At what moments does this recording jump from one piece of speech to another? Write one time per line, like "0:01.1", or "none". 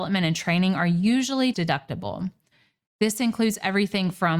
0:01.5